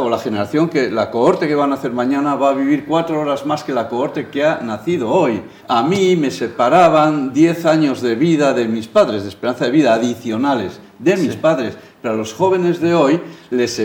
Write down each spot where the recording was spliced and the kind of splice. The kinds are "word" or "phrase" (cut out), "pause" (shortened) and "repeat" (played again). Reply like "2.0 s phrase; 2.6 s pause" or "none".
5.6 s pause